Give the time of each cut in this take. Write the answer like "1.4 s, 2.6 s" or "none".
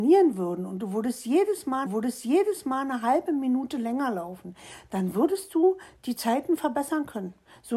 1.9 s